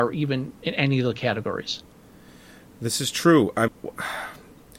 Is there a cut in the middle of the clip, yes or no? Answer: yes